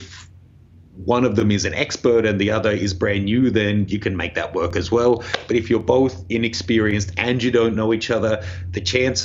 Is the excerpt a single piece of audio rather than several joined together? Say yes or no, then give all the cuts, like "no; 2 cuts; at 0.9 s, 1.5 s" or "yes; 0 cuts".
yes; 0 cuts